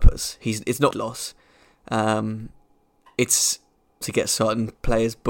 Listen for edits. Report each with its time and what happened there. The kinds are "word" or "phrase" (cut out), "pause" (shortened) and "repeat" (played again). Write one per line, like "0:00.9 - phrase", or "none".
0:00.9 - word
0:04.0 - word